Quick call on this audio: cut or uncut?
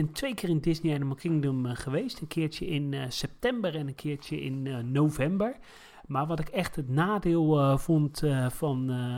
uncut